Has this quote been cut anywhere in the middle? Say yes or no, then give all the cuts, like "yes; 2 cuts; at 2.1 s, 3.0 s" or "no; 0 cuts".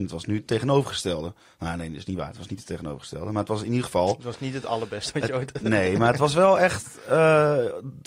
no; 0 cuts